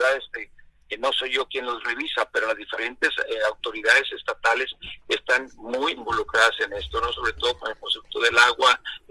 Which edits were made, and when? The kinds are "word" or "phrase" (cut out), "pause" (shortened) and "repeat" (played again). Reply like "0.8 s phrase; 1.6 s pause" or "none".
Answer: 6.0 s word